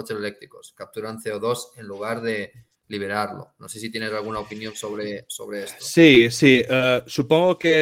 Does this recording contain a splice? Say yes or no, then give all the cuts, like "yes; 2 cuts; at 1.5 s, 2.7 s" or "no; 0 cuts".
no; 0 cuts